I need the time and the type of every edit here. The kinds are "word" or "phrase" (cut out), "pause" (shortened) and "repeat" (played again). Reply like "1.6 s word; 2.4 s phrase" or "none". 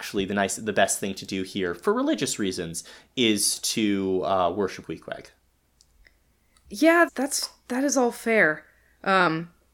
4.8 s word; 7.1 s word